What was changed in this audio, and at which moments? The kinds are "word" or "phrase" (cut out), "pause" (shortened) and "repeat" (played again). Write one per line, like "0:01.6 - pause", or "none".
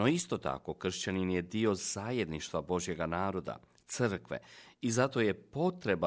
none